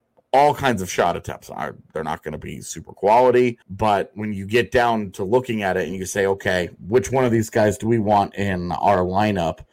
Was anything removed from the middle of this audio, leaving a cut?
yes; 1 cut; at 3.6 s

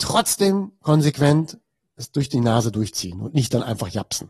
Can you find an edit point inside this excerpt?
no; 0 cuts

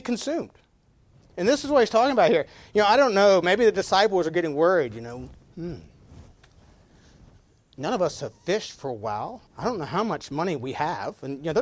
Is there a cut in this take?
yes; 1 cut; at 9.5 s

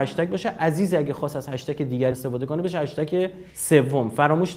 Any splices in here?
yes; 2 cuts; at 2.1 s, 3.5 s

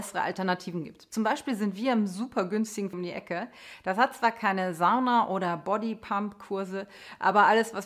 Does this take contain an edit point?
yes; 1 cut; at 2.9 s

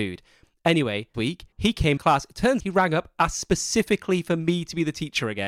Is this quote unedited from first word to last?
no; 4 cuts; at 1.1 s, 1.5 s, 2.0 s, 2.6 s

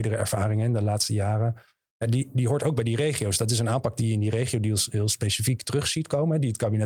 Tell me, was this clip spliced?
no; 0 cuts

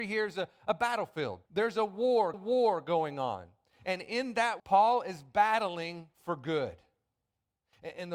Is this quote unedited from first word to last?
no; 4 cuts; at 1.5 s, 2.3 s, 4.6 s, 6.1 s

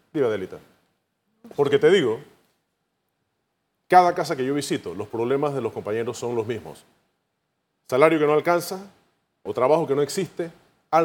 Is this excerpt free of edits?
yes; 0 cuts

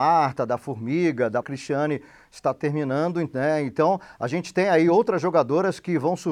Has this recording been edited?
yes; 1 cut; at 1.4 s

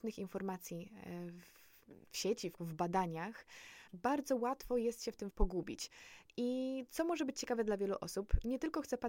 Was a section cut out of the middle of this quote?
yes; 3 cuts; at 2.6 s, 3.9 s, 5.3 s

